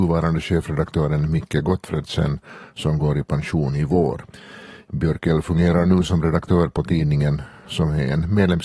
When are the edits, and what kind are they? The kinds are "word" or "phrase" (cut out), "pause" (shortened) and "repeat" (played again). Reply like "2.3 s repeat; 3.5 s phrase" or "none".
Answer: none